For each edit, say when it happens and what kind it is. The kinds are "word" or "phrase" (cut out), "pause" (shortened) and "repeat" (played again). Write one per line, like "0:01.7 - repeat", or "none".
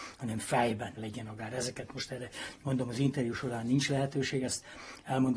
0:01.0 - word